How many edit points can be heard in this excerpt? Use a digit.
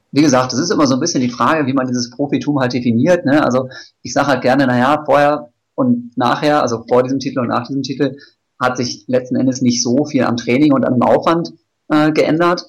0